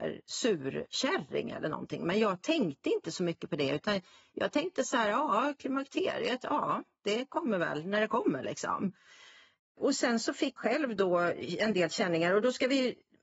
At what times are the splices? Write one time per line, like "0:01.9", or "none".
0:10.6